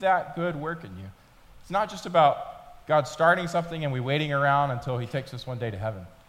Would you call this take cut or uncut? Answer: uncut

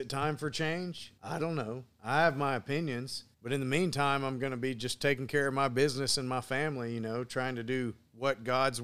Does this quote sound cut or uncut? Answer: cut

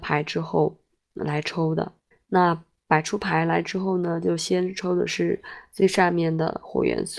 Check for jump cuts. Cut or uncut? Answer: cut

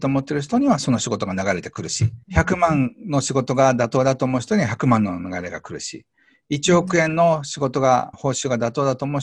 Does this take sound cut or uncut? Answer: cut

